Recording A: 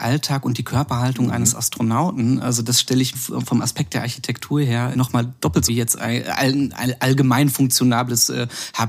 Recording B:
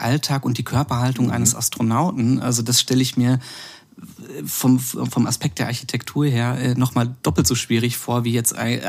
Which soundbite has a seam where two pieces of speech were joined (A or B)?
A